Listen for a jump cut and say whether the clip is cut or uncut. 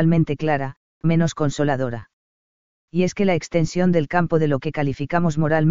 cut